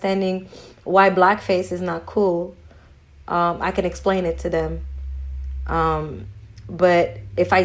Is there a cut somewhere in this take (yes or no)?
no